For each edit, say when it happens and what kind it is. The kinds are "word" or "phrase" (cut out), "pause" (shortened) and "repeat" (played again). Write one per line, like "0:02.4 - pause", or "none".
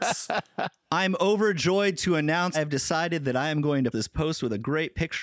0:02.5 - phrase
0:03.9 - word

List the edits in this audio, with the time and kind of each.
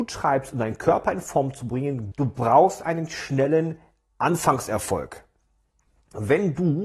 0:02.1 - word

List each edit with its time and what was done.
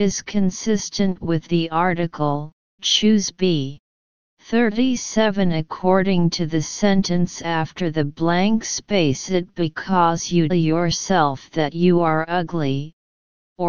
0:01.5 - phrase
0:02.8 - word
0:03.9 - pause
0:09.3 - word
0:10.5 - word

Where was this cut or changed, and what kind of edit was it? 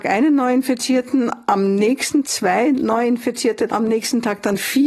0:02.2 - word
0:03.7 - word

